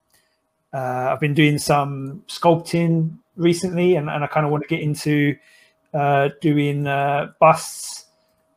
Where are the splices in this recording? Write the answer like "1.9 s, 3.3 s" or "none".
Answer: none